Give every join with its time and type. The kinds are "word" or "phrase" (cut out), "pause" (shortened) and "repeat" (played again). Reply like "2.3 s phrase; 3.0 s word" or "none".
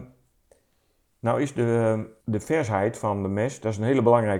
2.2 s pause